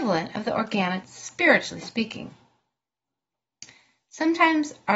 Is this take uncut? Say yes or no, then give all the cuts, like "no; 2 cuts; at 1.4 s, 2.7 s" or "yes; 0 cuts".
no; 1 cut; at 1.0 s